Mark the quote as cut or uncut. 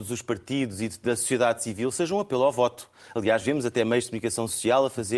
uncut